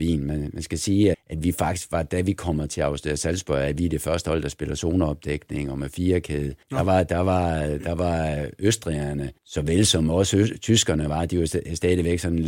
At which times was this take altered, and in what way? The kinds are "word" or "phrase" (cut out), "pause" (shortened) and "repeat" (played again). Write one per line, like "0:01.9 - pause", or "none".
0:01.1 - word
0:06.6 - pause
0:09.4 - pause